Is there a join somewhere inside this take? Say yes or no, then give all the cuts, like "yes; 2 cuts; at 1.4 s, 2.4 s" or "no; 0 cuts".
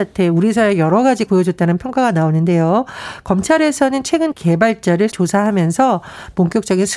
yes; 3 cuts; at 1.3 s, 4.3 s, 5.1 s